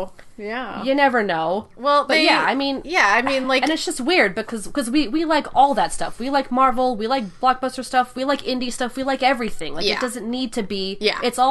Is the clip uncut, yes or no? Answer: yes